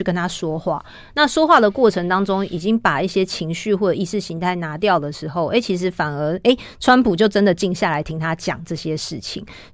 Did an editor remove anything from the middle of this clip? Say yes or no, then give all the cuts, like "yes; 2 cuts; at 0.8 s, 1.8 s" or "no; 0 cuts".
no; 0 cuts